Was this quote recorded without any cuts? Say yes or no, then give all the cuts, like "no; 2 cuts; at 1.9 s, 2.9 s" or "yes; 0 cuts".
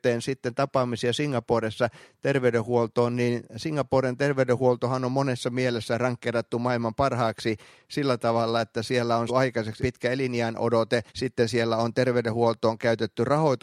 no; 3 cuts; at 9.3 s, 9.8 s, 11.1 s